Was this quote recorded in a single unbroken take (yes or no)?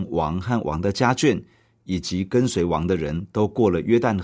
yes